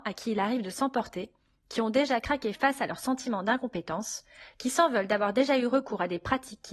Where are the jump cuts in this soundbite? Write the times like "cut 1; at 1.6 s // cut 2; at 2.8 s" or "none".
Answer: none